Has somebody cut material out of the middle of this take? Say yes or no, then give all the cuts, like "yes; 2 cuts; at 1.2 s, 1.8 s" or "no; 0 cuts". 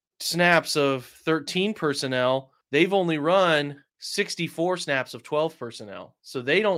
yes; 2 cuts; at 2.6 s, 3.9 s